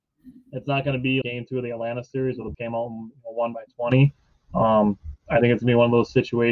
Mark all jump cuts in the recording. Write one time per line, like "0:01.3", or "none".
0:01.2
0:02.5